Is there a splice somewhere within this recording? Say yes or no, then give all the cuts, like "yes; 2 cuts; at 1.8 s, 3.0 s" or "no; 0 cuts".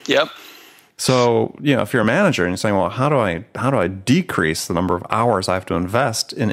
no; 0 cuts